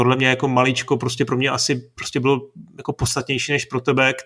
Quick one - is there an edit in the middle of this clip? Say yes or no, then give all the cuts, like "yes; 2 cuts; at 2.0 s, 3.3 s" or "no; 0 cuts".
no; 0 cuts